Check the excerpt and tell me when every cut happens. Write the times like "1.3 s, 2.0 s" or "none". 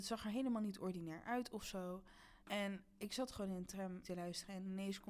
2.4 s, 4.0 s